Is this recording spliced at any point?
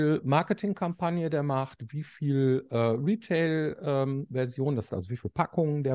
yes; 1 cut; at 4.9 s

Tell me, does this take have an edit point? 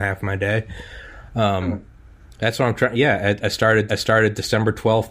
yes; 1 cut; at 3.9 s

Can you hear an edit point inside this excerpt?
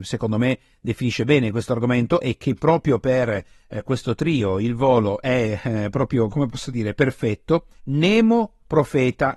yes; 1 cut; at 7.8 s

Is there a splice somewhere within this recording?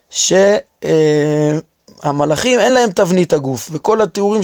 no; 0 cuts

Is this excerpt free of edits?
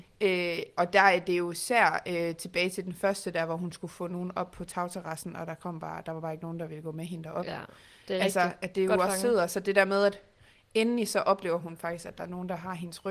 yes; 0 cuts

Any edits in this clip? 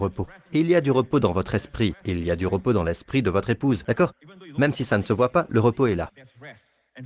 no; 0 cuts

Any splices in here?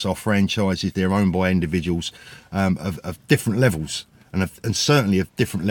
no; 0 cuts

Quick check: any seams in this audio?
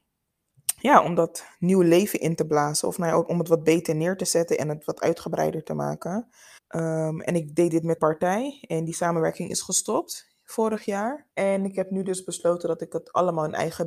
yes; 3 cuts; at 6.6 s, 8.0 s, 11.3 s

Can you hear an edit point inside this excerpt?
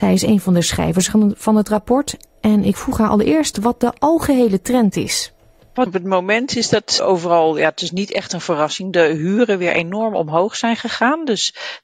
yes; 2 cuts; at 5.9 s, 7.0 s

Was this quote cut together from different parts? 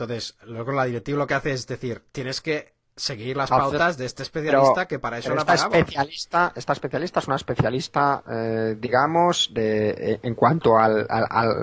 no; 0 cuts

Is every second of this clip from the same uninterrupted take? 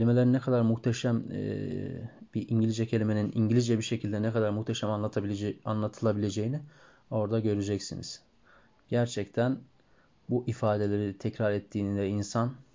yes; 0 cuts

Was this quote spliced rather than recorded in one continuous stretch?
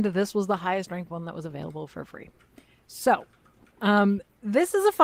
no; 0 cuts

